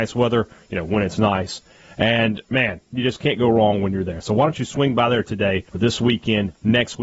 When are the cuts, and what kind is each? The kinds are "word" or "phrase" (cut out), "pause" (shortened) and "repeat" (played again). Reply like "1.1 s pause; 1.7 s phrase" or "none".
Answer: 2.5 s pause; 5.7 s pause